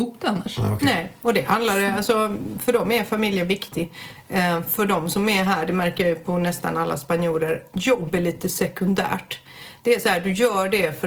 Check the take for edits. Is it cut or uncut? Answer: uncut